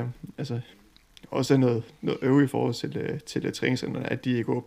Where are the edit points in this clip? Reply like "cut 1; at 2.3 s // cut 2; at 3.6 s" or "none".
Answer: none